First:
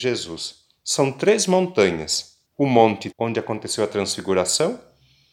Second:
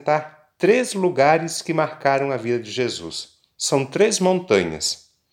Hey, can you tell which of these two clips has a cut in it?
first; 2 cuts; at 2.4 s, 3.1 s

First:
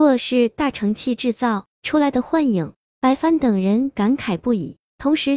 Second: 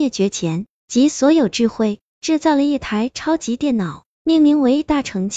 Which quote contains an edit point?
first; 1 cut; at 1.7 s

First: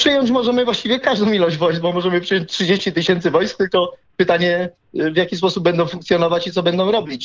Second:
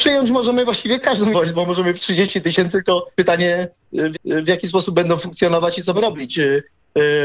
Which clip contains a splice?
second; 6 cuts; at 1.3 s, 2.0 s, 2.7 s, 3.1 s, 4.1 s, 5.9 s

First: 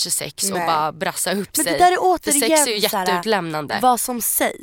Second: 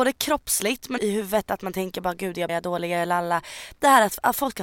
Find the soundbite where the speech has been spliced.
second; 2 cuts; at 1.0 s, 2.5 s

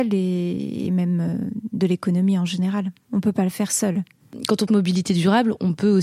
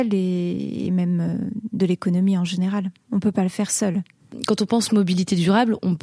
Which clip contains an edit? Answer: first; 1 cut; at 4.7 s

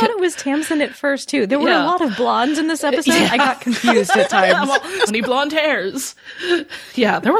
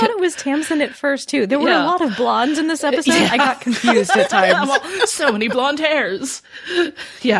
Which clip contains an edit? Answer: first; 1 cut; at 5.1 s

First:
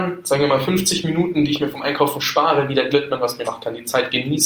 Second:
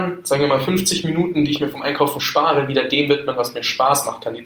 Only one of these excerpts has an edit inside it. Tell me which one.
first; 2 cuts; at 2.9 s, 3.4 s

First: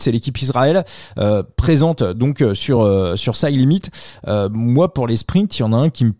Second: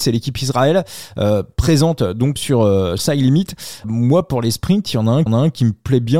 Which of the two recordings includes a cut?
second; 4 cuts; at 2.4 s, 3.0 s, 3.8 s, 5.3 s

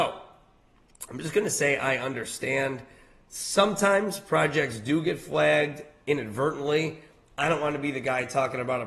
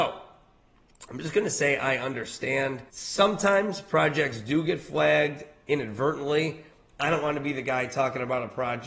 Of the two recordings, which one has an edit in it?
second; 1 cut; at 2.9 s

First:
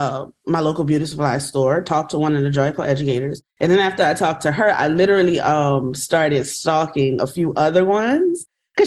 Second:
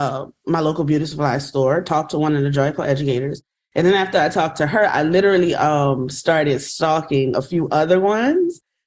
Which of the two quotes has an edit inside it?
first; 1 cut; at 3.5 s

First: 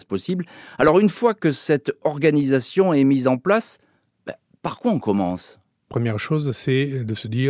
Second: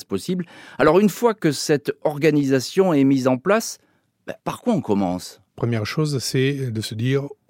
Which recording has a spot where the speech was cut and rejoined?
second; 2 cuts; at 4.4 s, 5.5 s

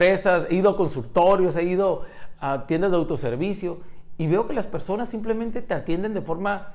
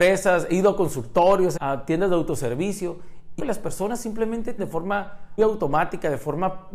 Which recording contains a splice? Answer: second; 4 cuts; at 1.6 s, 3.4 s, 4.6 s, 5.4 s

